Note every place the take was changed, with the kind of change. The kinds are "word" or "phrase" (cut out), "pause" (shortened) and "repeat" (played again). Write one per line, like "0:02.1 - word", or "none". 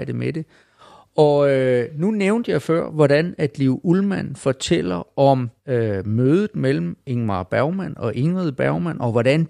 0:05.6 - pause

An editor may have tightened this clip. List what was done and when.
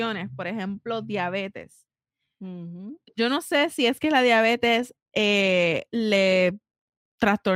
none

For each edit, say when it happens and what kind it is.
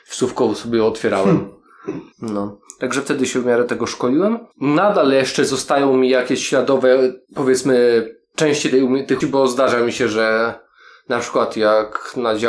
0:02.1 - pause
0:04.5 - pause
0:07.2 - pause
0:09.2 - word

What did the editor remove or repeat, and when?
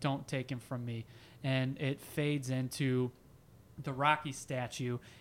none

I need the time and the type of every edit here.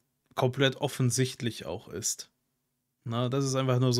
none

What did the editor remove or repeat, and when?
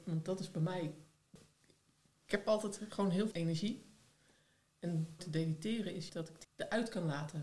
0:03.3 - word
0:05.2 - word
0:06.1 - word
0:06.4 - word

